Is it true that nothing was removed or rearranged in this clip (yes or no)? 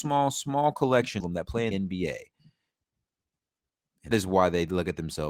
no